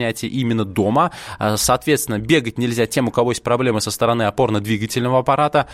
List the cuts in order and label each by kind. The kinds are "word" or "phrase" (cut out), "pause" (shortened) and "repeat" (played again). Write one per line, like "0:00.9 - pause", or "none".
none